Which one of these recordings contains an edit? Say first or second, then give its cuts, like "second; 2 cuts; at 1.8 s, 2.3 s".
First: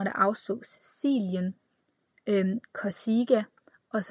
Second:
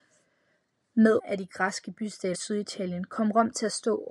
second; 2 cuts; at 1.2 s, 2.3 s